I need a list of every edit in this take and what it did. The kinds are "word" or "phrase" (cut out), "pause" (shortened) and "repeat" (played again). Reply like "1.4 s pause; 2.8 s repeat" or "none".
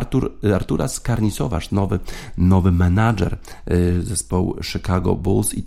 1.7 s phrase